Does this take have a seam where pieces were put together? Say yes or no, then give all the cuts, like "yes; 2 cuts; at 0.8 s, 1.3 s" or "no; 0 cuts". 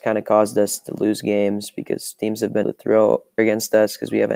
yes; 2 cuts; at 2.6 s, 3.4 s